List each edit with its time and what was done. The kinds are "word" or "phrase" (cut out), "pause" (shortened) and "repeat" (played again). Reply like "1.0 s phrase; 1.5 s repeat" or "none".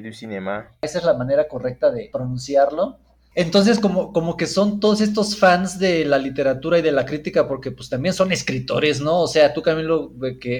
none